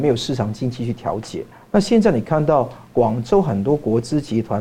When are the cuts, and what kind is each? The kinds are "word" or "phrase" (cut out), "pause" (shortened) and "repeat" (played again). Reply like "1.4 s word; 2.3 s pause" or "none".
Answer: 1.5 s pause